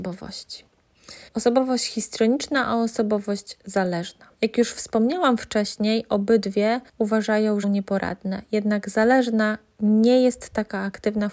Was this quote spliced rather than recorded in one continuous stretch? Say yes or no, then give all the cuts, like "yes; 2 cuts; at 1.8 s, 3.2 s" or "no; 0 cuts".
yes; 4 cuts; at 1.3 s, 4.3 s, 6.9 s, 7.6 s